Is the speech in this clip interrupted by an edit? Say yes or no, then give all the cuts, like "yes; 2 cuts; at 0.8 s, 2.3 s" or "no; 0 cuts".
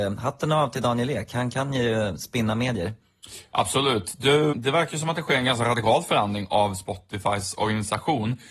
yes; 1 cut; at 4.5 s